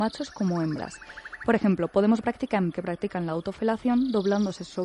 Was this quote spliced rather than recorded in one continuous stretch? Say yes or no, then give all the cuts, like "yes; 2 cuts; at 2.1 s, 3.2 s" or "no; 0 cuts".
yes; 2 cuts; at 2.2 s, 2.7 s